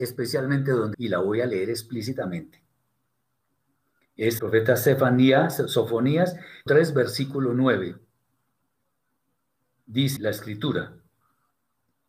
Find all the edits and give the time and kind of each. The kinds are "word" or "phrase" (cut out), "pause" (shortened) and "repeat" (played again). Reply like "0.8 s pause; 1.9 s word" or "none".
0.9 s word; 4.4 s word; 6.7 s word; 10.2 s word